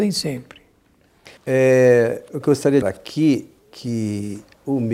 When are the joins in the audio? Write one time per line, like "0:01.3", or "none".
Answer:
0:01.4
0:02.8
0:03.6